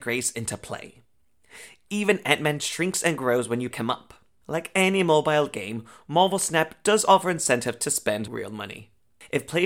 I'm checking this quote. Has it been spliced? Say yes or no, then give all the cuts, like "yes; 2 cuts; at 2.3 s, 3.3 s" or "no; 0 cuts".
yes; 1 cut; at 3.7 s